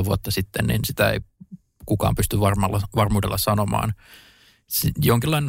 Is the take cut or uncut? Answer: uncut